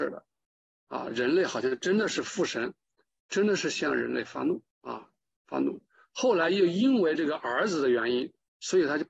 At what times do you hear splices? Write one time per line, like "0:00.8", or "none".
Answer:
0:01.1
0:04.7